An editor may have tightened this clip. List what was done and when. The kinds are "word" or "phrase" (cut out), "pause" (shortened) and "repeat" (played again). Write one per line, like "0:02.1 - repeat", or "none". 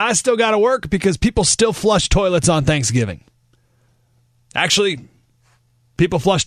none